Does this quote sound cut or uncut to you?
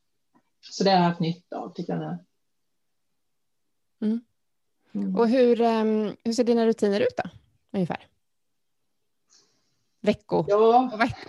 uncut